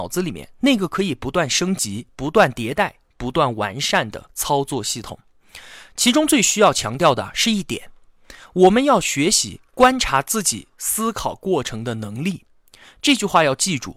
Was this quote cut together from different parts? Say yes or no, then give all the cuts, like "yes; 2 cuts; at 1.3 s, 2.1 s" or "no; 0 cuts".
no; 0 cuts